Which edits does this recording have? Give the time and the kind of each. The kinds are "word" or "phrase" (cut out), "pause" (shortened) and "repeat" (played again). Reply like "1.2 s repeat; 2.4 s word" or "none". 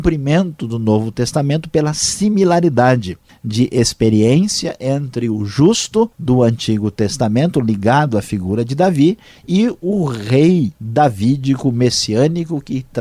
3.3 s pause; 6.1 s pause; 10.7 s pause